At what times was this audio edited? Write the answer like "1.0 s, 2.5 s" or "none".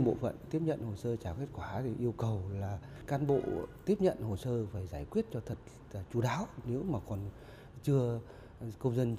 none